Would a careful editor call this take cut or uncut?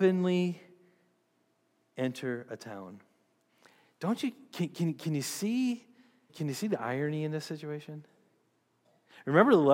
cut